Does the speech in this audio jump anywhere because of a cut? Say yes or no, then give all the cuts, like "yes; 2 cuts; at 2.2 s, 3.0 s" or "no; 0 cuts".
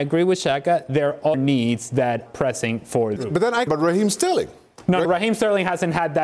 yes; 5 cuts; at 1.3 s, 2.3 s, 3.2 s, 3.7 s, 5.0 s